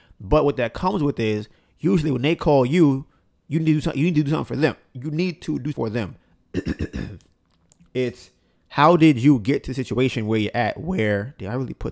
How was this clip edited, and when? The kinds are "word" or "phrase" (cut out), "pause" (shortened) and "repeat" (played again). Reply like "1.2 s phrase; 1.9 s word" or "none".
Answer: 5.7 s word; 7.9 s word